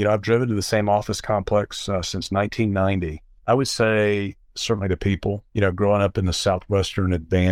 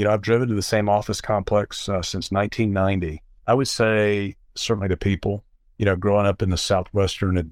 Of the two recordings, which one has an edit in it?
first; 1 cut; at 5.5 s

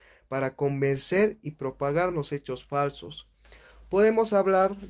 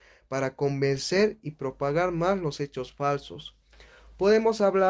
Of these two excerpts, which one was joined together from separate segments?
first; 1 cut; at 2.1 s

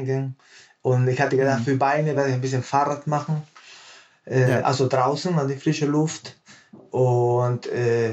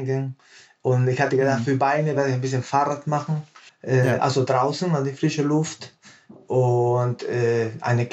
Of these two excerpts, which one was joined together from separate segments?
second; 1 cut; at 3.7 s

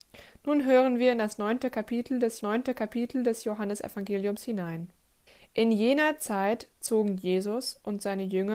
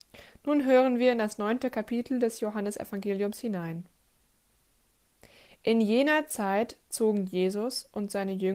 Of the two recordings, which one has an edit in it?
first; 2 cuts; at 2.4 s, 5.3 s

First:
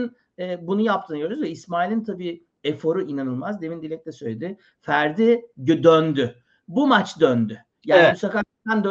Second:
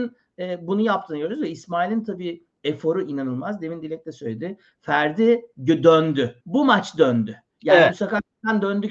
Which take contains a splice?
second; 1 cut; at 6.4 s

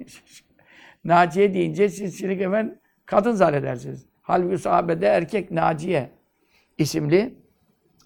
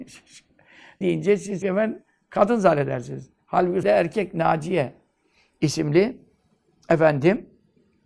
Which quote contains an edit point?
second; 3 cuts; at 1.0 s, 1.6 s, 3.8 s

